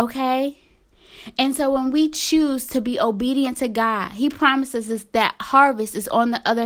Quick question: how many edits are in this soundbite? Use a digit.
0